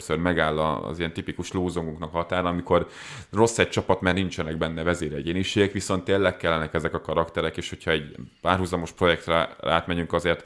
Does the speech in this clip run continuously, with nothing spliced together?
yes; 0 cuts

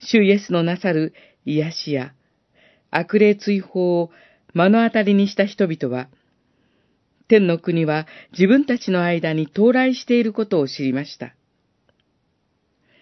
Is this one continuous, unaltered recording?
yes; 0 cuts

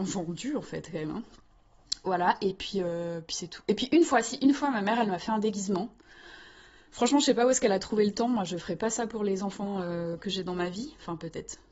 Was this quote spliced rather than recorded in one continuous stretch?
no; 0 cuts

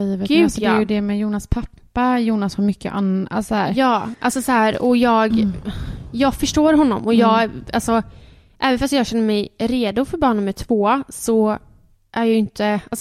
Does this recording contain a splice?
no; 0 cuts

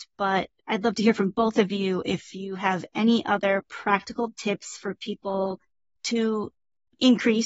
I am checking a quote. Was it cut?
no; 0 cuts

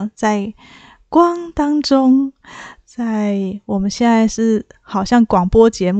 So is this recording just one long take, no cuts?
yes; 0 cuts

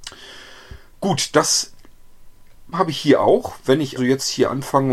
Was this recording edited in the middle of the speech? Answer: yes; 2 cuts; at 2.7 s, 4.0 s

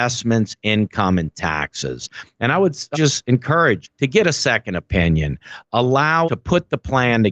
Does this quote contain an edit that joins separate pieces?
yes; 3 cuts; at 2.9 s, 3.8 s, 6.2 s

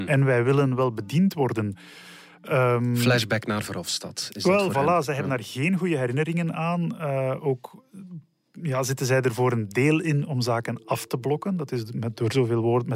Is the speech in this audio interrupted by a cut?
no; 0 cuts

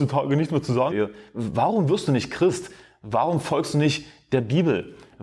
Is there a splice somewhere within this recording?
yes; 1 cut; at 0.9 s

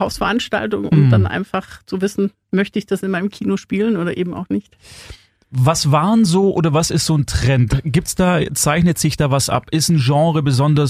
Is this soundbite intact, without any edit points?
yes; 0 cuts

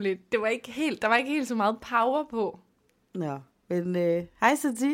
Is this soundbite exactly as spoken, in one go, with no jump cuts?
yes; 0 cuts

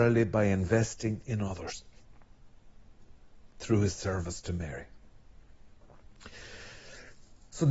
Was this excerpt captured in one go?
yes; 0 cuts

